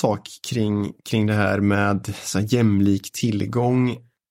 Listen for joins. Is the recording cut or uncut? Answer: uncut